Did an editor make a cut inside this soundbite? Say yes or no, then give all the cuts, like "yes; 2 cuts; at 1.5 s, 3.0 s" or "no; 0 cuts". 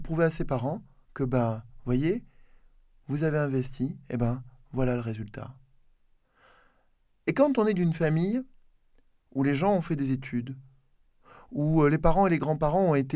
no; 0 cuts